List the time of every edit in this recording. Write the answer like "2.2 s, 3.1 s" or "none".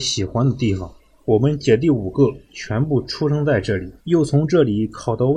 1.0 s, 4.0 s